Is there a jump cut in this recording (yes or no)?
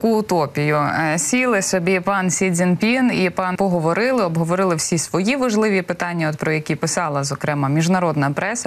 yes